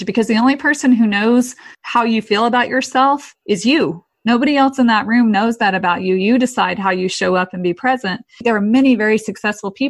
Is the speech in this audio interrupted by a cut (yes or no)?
yes